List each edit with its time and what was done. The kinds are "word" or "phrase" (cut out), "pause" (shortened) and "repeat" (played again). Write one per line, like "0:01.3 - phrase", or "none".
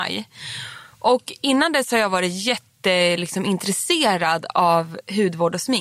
none